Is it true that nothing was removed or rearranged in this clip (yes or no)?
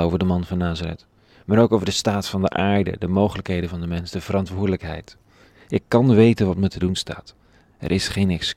yes